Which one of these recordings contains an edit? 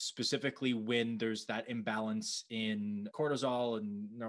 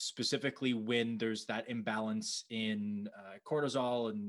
first; 1 cut; at 3.1 s

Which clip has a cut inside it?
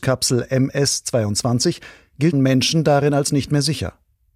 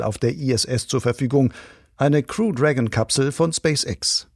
first; 1 cut; at 2.3 s

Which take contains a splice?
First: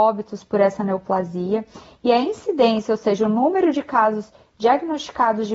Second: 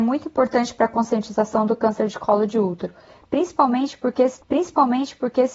second; 1 cut; at 4.4 s

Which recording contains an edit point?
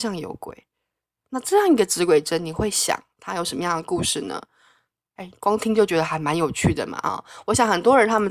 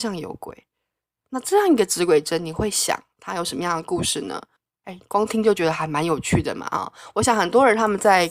second; 1 cut; at 4.6 s

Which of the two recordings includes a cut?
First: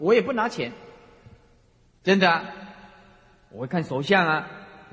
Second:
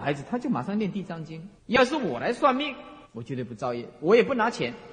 second; 2 cuts; at 1.6 s, 3.0 s

